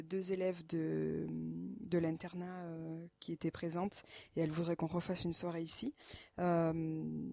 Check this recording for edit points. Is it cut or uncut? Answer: uncut